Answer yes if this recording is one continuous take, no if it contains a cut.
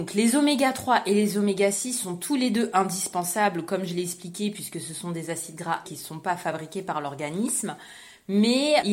no